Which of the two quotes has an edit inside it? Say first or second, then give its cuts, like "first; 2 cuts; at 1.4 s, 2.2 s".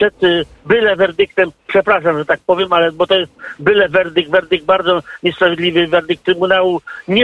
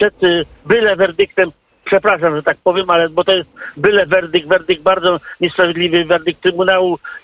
first; 1 cut; at 1.6 s